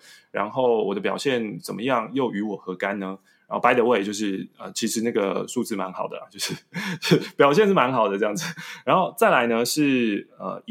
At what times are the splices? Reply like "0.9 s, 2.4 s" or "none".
none